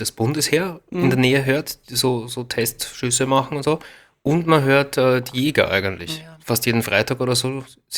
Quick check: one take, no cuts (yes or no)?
yes